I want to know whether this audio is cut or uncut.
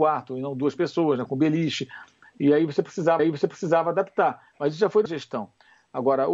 cut